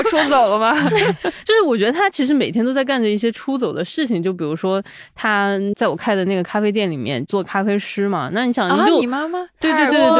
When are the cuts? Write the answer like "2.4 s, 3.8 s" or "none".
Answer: none